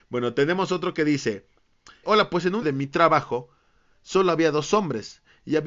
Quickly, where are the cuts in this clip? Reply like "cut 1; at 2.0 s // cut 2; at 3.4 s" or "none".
cut 1; at 2.0 s // cut 2; at 2.6 s